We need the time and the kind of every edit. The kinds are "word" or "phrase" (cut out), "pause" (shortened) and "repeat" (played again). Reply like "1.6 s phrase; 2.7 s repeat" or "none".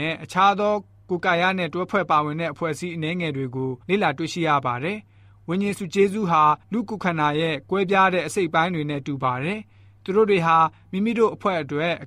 3.8 s pause; 6.6 s pause